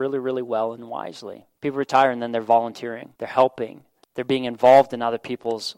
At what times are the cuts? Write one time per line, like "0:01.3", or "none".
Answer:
0:01.5
0:03.2